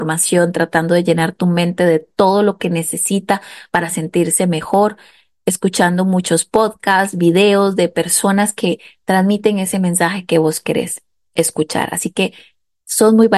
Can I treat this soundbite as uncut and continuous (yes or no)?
yes